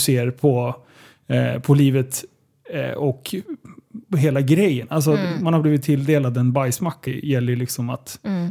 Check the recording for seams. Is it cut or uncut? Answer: cut